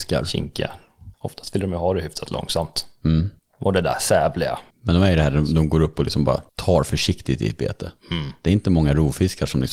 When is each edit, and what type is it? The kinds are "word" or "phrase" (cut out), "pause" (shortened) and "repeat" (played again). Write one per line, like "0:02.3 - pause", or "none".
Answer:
0:01.1 - pause
0:03.4 - pause
0:04.7 - pause
0:06.5 - pause